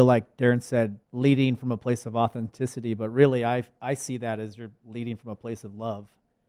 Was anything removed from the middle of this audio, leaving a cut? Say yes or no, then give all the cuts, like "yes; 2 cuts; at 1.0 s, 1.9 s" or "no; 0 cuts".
yes; 1 cut; at 1.0 s